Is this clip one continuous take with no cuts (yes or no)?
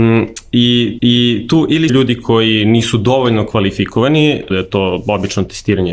no